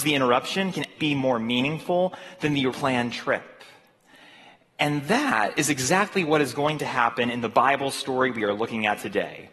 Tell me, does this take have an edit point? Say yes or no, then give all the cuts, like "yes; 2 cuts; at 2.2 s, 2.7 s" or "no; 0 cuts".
yes; 2 cuts; at 1.0 s, 2.7 s